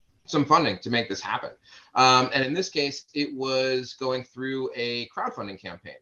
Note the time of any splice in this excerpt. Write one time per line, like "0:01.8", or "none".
none

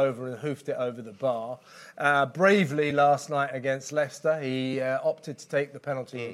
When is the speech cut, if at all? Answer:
none

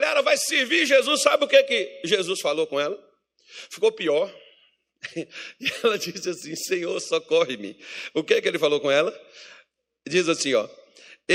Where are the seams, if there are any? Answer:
none

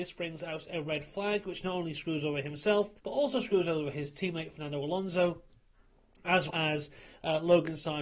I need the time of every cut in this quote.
0:03.0
0:06.5

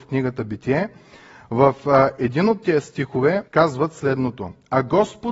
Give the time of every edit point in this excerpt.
0:03.5

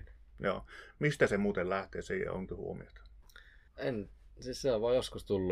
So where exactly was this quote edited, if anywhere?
0:02.5
0:03.7

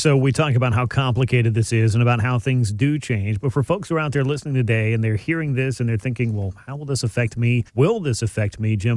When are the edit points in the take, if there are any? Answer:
0:07.7

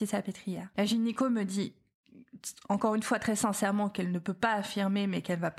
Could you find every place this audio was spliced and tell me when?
none

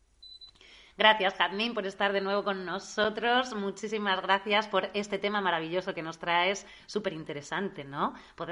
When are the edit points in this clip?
none

